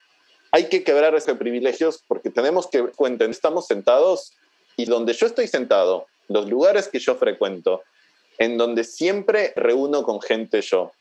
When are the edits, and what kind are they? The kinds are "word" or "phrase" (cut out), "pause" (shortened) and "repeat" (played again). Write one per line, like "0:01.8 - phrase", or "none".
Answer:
0:01.2 - word
0:02.9 - word
0:03.3 - word
0:04.9 - word
0:09.6 - word